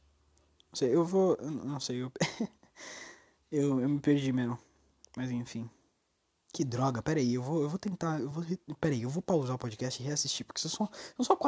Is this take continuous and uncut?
yes; 0 cuts

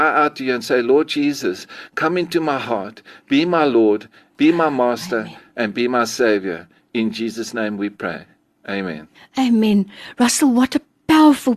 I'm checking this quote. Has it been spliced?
no; 0 cuts

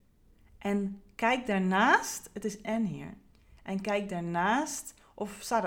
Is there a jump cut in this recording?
yes; 1 cut; at 2.6 s

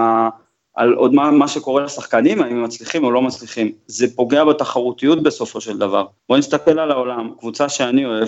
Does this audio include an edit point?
yes; 1 cut; at 6.2 s

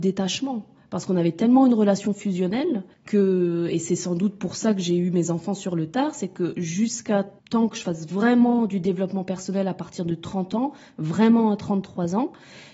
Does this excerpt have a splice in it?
yes; 2 cuts; at 2.9 s, 7.4 s

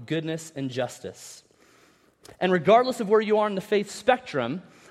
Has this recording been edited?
no; 0 cuts

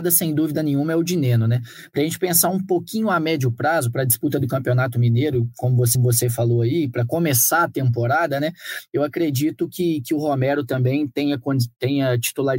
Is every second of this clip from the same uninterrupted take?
no; 1 cut; at 5.9 s

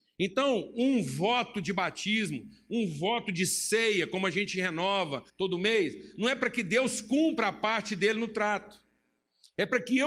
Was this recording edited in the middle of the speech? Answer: yes; 1 cut; at 5.3 s

